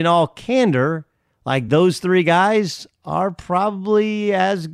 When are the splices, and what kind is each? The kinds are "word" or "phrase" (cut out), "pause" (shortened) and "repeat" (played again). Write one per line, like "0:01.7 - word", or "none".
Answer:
none